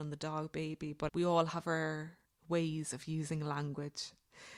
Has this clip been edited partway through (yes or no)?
yes